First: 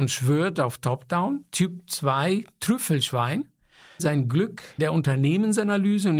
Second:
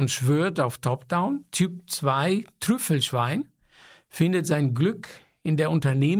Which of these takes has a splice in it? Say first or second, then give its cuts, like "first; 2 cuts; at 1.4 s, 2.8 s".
first; 2 cuts; at 4.0 s, 4.8 s